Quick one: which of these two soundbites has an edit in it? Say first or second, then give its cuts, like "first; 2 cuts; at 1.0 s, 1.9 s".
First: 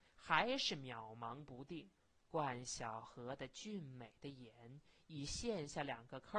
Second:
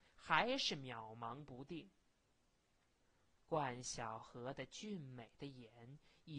first; 1 cut; at 2.0 s